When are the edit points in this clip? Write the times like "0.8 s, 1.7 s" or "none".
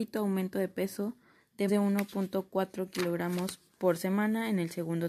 1.7 s, 3.7 s